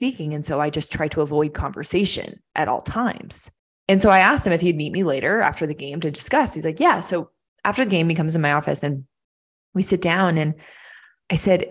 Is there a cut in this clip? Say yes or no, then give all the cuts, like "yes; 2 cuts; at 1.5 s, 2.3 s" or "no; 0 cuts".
yes; 2 cuts; at 2.5 s, 3.6 s